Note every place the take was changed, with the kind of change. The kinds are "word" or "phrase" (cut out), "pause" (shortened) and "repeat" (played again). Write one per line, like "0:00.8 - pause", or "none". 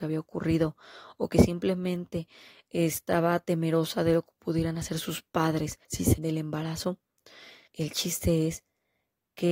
0:05.8 - pause
0:06.2 - word
0:07.7 - pause